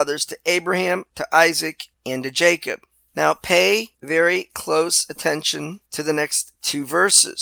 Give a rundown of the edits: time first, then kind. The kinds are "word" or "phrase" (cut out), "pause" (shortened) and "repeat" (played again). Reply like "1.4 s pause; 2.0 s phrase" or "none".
none